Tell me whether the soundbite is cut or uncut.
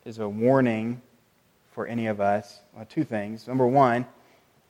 uncut